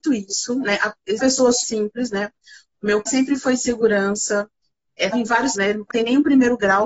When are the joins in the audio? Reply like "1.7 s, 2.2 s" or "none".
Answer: 1.2 s, 1.6 s, 3.1 s, 5.1 s, 5.5 s, 5.9 s